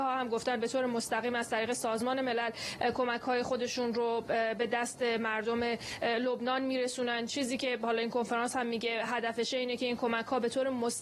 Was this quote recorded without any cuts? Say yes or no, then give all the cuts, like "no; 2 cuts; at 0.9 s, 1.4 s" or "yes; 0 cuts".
yes; 0 cuts